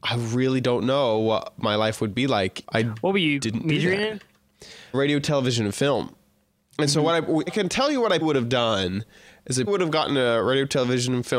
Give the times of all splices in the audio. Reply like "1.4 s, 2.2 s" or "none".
2.6 s, 4.9 s, 7.5 s, 8.2 s, 9.7 s